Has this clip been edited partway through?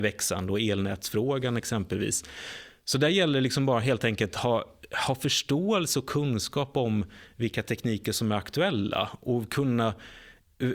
no; 0 cuts

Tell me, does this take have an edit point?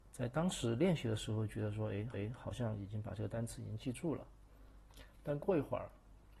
yes; 1 cut; at 2.1 s

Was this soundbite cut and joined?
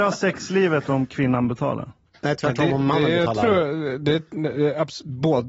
no; 0 cuts

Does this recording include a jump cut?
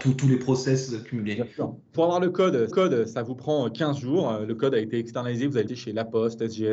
yes; 3 cuts; at 1.9 s, 2.7 s, 5.7 s

